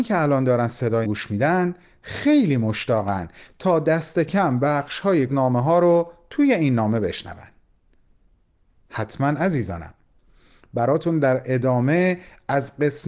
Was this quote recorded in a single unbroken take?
no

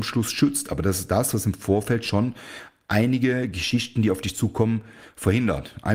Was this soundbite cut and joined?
no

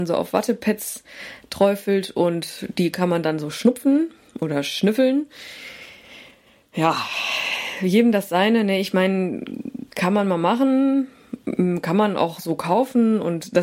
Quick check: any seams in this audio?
no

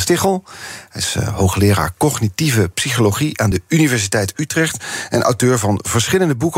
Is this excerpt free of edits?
yes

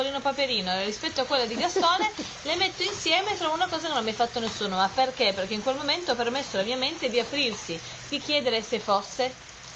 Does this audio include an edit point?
no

